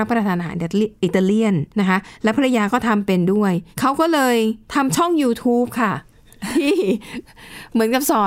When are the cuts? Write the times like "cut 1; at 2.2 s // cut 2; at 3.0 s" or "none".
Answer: cut 1; at 1.7 s // cut 2; at 3.7 s // cut 3; at 4.6 s